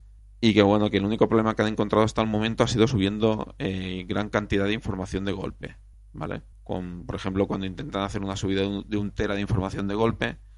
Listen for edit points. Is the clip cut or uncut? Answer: cut